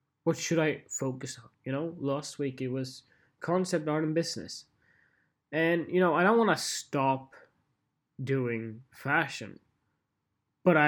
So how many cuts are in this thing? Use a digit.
1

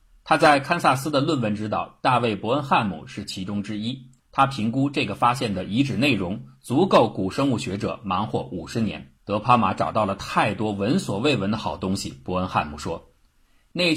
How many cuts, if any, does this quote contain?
2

